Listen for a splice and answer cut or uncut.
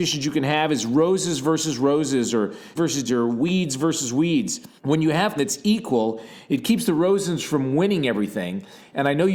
cut